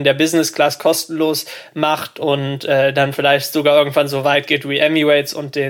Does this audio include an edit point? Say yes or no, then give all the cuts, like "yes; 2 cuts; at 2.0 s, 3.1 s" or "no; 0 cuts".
no; 0 cuts